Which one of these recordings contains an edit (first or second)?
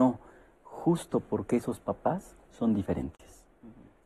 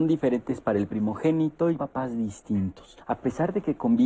second